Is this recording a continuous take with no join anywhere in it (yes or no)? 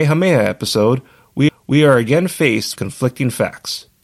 no